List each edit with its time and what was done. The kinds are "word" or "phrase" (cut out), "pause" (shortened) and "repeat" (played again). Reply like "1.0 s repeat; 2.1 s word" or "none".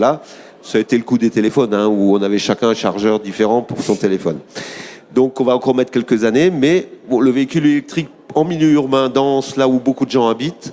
none